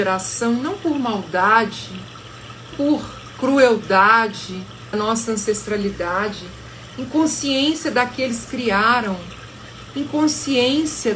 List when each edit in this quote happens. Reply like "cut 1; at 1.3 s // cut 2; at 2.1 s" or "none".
cut 1; at 2.7 s // cut 2; at 4.9 s // cut 3; at 8.5 s